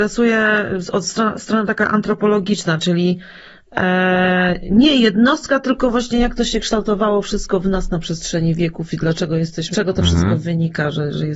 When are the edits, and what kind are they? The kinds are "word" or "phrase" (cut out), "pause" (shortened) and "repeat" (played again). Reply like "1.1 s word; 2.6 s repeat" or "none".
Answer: 9.7 s word